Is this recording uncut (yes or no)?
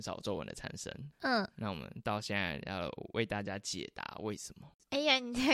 no